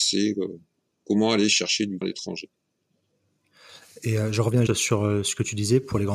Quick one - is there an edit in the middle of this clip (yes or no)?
yes